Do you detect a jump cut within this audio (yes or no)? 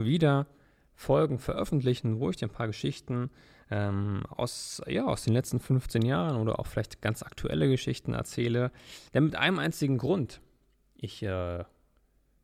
no